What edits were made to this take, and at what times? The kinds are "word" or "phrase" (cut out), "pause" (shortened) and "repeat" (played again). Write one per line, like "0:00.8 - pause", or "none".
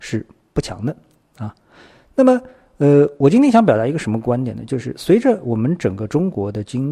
none